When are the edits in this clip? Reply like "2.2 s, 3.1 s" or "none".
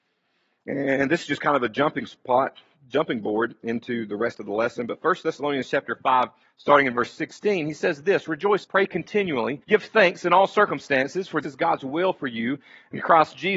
6.4 s, 8.6 s, 9.6 s, 11.4 s